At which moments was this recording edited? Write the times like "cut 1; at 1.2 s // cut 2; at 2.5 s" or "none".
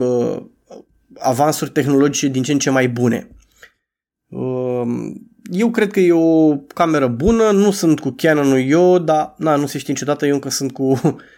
none